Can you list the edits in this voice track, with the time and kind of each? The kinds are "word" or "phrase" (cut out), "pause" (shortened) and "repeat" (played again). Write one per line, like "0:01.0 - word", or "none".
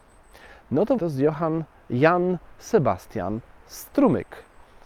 0:01.0 - word